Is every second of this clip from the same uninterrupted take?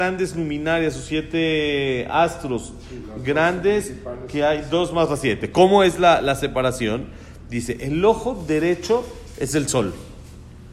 yes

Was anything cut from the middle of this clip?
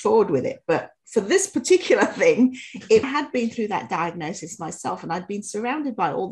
yes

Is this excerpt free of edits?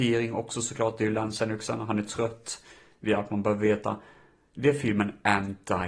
yes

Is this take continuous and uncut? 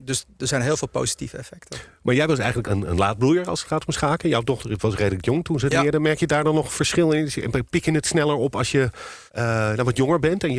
no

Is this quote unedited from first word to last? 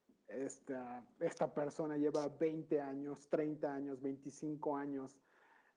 yes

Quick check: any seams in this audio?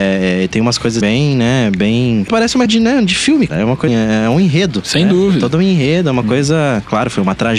yes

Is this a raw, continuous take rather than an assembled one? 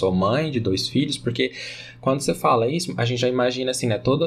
yes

